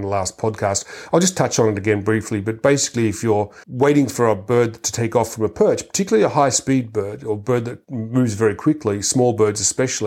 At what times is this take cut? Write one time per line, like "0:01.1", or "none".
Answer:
0:03.6
0:07.8

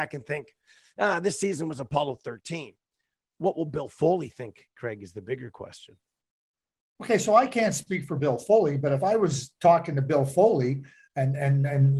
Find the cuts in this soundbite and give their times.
none

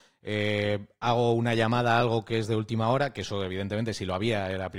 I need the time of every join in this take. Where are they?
none

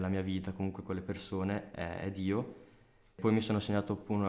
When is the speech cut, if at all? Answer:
none

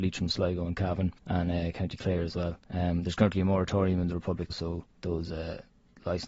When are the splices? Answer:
0:01.2
0:02.6
0:04.5
0:04.9

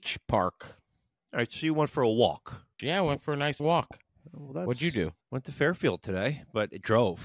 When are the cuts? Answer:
0:02.7
0:03.6
0:05.2

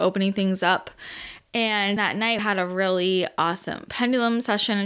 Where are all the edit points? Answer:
0:02.0
0:02.4

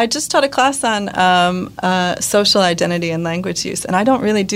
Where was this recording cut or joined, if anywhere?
none

